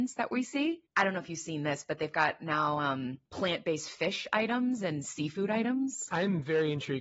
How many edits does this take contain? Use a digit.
1